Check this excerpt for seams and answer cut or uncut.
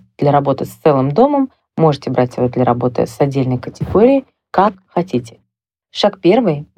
uncut